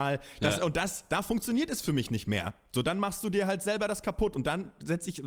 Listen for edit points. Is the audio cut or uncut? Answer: uncut